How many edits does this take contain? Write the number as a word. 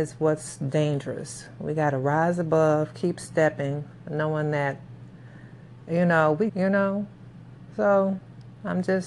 one